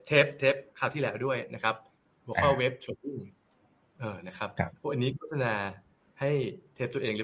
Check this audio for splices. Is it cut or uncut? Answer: uncut